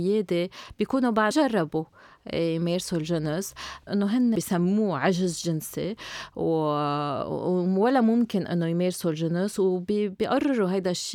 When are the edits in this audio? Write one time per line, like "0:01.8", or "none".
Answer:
0:01.3
0:03.9
0:04.3